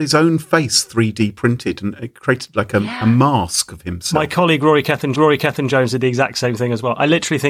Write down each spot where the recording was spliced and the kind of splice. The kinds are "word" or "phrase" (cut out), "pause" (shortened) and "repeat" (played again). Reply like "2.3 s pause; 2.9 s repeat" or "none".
5.1 s repeat